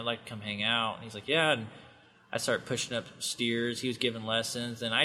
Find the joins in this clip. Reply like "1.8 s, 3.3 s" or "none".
none